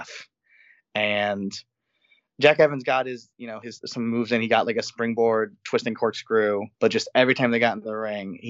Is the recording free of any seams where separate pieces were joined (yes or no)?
no